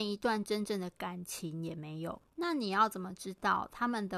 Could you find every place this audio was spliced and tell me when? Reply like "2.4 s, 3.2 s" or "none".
2.3 s